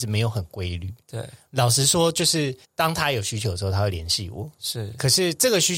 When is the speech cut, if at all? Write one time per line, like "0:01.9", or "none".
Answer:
0:02.6